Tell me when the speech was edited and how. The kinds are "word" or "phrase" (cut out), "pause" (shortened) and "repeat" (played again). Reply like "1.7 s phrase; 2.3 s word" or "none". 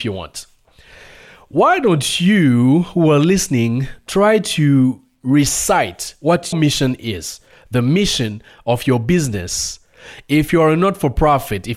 6.5 s word